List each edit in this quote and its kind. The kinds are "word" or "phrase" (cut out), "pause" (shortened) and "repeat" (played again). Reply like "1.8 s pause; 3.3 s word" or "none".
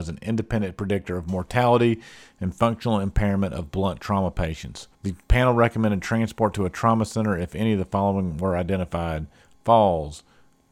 4.9 s pause